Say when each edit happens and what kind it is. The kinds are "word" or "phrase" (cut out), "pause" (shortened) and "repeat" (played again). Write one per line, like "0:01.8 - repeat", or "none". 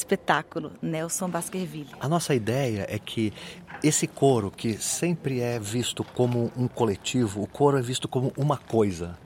none